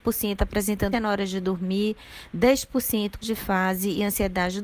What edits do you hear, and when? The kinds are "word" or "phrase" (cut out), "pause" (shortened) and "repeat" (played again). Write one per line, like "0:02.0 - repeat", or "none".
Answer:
0:00.9 - word
0:03.2 - word